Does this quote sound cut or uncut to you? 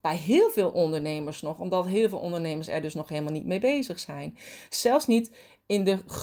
uncut